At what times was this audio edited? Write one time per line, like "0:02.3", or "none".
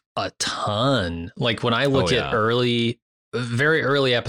0:03.1